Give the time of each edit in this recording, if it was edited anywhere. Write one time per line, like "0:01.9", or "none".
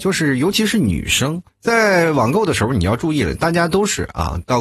0:01.5